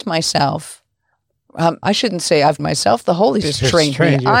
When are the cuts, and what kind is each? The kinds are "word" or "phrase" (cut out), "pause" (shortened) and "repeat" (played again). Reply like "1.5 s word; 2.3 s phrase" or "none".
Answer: 1.8 s word; 2.6 s word; 3.4 s word